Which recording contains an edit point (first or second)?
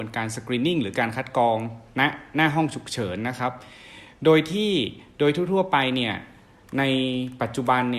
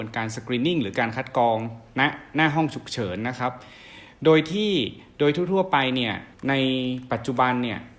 second